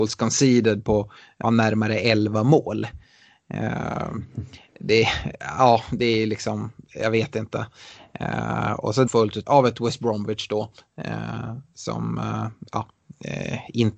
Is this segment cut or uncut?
cut